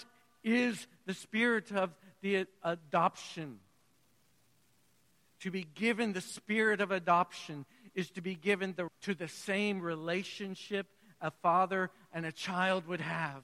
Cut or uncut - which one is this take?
cut